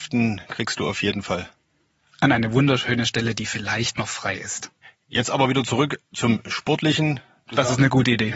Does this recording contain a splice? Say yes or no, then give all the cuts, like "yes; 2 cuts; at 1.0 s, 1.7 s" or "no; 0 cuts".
no; 0 cuts